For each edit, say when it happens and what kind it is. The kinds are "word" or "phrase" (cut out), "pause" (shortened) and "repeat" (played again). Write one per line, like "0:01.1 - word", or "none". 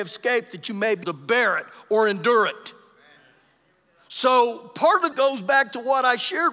0:01.0 - word
0:05.1 - word